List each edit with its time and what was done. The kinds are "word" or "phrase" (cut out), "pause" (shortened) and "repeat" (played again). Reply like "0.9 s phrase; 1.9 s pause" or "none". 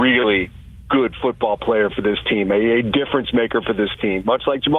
none